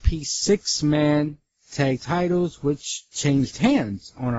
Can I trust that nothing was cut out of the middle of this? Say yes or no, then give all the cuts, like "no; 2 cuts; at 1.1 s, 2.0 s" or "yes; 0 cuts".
no; 2 cuts; at 2.0 s, 3.1 s